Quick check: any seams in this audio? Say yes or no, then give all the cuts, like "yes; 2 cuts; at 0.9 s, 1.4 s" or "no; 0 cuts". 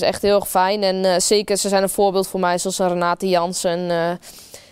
no; 0 cuts